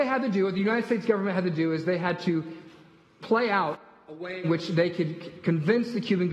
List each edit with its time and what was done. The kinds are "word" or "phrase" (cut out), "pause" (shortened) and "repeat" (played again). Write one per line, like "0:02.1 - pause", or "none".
none